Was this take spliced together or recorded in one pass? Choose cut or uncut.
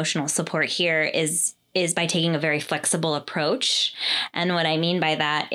uncut